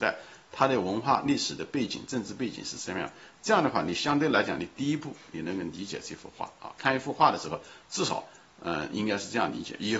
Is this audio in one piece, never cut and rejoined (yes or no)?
yes